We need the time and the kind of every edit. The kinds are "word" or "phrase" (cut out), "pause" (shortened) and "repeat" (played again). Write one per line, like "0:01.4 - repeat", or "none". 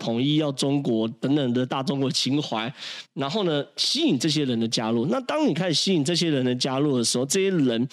0:03.0 - pause